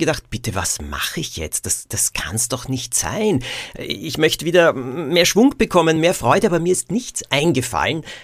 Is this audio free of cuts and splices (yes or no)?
yes